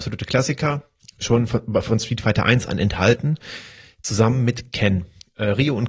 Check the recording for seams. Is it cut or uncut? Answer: uncut